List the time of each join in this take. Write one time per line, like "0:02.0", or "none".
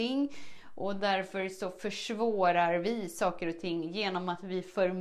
none